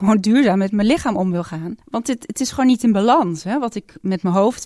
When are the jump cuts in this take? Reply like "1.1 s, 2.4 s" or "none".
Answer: 1.8 s